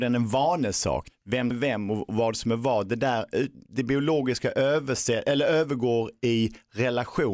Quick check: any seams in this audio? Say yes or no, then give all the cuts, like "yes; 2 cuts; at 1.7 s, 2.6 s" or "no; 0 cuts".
yes; 1 cut; at 1.5 s